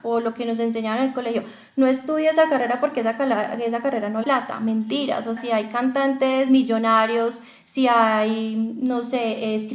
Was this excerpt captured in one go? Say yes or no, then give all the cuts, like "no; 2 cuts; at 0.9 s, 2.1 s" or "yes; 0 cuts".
no; 2 cuts; at 4.2 s, 5.4 s